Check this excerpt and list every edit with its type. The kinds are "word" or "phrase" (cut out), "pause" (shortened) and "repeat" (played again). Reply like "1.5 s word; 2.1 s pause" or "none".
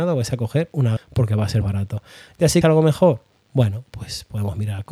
1.0 s phrase; 1.6 s word; 2.6 s word